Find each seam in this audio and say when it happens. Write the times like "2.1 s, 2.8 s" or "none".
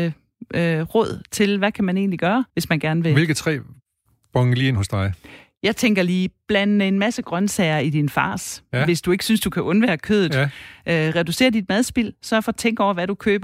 2.5 s